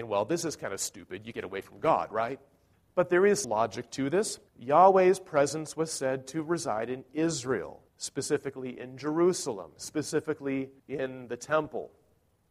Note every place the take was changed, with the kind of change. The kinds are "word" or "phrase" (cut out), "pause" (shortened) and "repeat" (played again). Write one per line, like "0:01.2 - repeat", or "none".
0:01.3 - word
0:02.7 - pause
0:03.4 - word
0:04.5 - pause
0:07.9 - pause
0:10.8 - pause